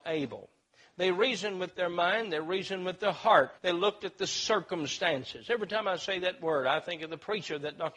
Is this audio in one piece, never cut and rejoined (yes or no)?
no